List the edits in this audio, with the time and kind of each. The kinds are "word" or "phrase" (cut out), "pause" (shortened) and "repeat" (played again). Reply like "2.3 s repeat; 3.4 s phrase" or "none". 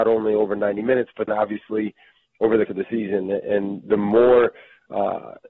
1.3 s word; 2.7 s word